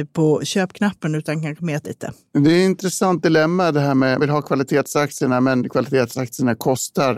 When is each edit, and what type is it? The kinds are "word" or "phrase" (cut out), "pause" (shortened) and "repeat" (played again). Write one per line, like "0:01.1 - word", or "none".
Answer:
0:01.8 - word
0:04.2 - word